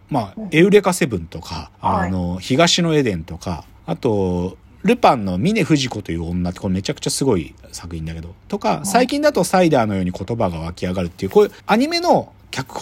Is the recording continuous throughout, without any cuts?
no; 3 cuts; at 1.7 s, 3.8 s, 11.6 s

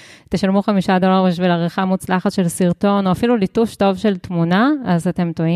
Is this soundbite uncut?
yes; 0 cuts

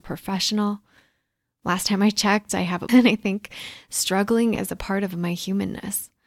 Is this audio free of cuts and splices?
no; 1 cut; at 2.9 s

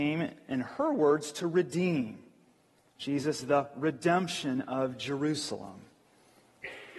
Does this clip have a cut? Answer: yes; 1 cut; at 3.4 s

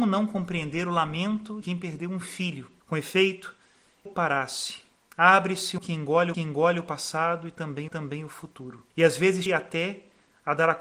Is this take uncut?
no; 8 cuts; at 1.6 s, 2.8 s, 4.0 s, 5.8 s, 6.3 s, 7.9 s, 8.9 s, 9.5 s

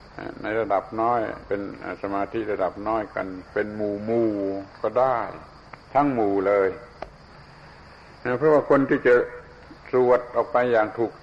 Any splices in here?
yes; 1 cut; at 3.5 s

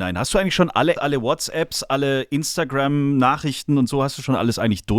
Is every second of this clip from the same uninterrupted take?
no; 1 cut; at 1.0 s

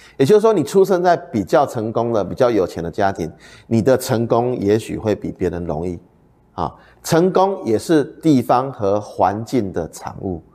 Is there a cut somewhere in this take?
no; 0 cuts

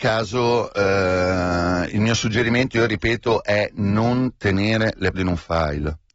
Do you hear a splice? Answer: yes; 1 cut; at 5.1 s

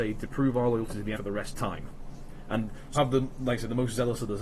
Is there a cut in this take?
yes; 3 cuts; at 1.2 s, 1.5 s, 3.0 s

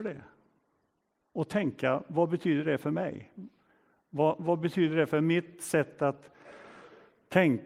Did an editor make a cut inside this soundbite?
no; 0 cuts

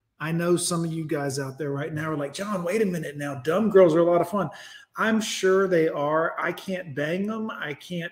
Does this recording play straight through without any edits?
yes; 0 cuts

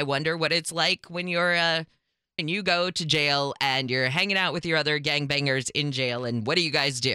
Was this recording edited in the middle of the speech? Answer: yes; 1 cut; at 2.4 s

